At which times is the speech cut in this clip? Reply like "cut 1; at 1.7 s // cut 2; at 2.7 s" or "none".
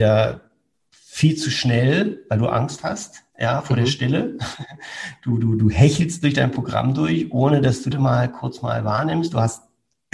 cut 1; at 7.9 s